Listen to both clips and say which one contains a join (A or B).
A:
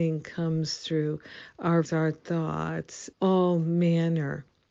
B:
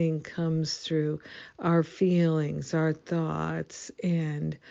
A